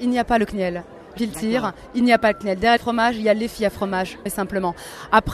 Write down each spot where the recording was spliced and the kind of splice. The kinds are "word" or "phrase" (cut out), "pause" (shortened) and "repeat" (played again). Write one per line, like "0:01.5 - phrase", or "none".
0:01.2 - word
0:02.8 - phrase
0:04.3 - word